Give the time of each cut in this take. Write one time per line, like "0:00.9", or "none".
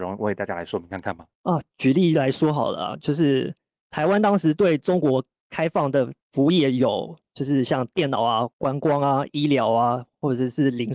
0:01.3
0:06.2
0:08.5